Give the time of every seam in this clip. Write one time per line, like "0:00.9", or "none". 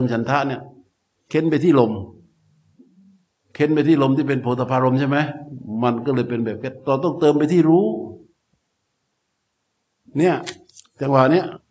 none